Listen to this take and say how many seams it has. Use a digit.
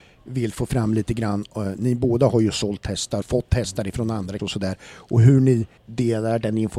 3